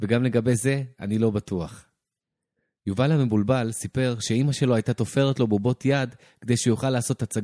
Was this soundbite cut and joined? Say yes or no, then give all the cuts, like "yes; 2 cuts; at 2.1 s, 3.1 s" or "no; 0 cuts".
no; 0 cuts